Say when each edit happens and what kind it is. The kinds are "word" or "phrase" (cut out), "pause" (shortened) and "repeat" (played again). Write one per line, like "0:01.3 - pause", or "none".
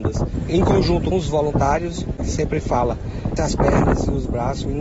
0:01.1 - word
0:02.2 - word
0:03.4 - word